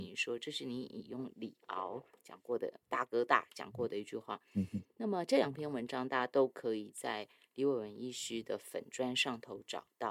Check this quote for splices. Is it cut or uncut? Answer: cut